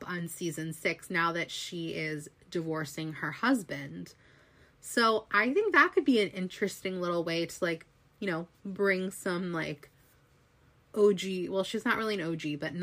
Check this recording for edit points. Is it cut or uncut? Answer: uncut